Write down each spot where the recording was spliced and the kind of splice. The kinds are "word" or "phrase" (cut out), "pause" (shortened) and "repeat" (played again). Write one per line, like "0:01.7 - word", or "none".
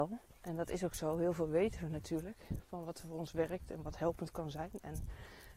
none